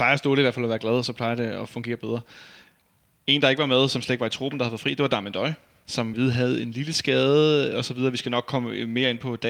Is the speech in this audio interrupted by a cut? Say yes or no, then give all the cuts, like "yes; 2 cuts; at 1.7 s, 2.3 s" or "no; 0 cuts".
yes; 1 cut; at 6.1 s